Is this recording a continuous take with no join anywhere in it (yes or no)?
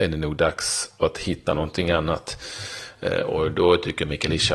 yes